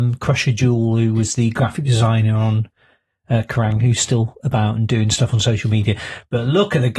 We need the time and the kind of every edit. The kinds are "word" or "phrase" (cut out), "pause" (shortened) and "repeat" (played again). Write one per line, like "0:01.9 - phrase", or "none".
none